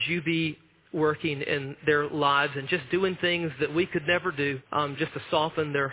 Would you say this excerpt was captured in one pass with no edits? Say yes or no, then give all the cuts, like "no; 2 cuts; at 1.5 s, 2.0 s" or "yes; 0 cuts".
no; 1 cut; at 4.6 s